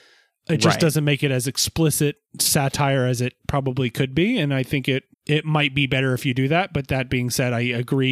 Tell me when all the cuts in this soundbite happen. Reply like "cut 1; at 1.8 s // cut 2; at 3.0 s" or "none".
cut 1; at 2.3 s // cut 2; at 5.1 s

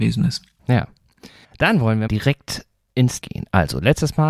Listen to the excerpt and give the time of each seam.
cut 1; at 1.4 s // cut 2; at 2.1 s // cut 3; at 3.2 s

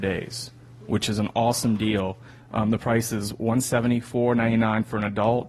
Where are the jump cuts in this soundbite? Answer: none

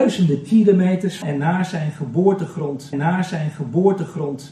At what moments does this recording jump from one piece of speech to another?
cut 1; at 1.2 s // cut 2; at 2.9 s

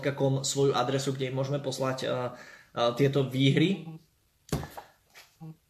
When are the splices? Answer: none

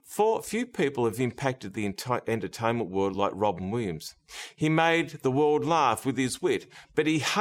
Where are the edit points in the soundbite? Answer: none

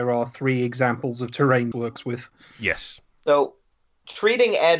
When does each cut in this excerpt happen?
cut 1; at 1.7 s

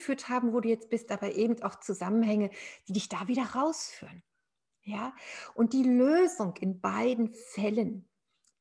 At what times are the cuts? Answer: none

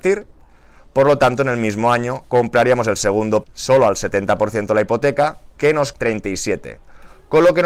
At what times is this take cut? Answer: cut 1; at 3.4 s // cut 2; at 5.9 s

